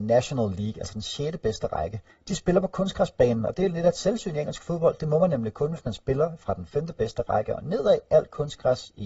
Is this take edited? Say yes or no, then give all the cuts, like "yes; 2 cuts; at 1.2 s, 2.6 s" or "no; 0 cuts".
yes; 1 cut; at 2.1 s